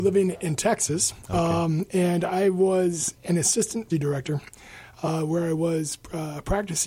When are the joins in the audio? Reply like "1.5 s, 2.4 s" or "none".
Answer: 3.9 s